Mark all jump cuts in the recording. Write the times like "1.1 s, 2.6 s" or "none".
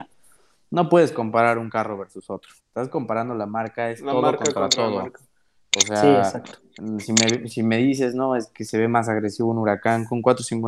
2.6 s